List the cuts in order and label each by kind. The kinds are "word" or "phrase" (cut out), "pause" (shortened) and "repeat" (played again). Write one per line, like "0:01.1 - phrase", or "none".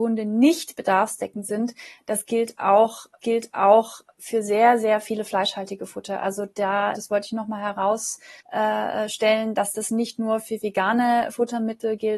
0:03.2 - repeat
0:06.9 - word
0:08.4 - pause